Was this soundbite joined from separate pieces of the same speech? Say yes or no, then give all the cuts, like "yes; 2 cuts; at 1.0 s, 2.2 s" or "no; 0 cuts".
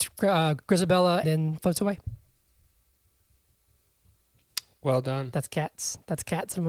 yes; 2 cuts; at 1.2 s, 1.6 s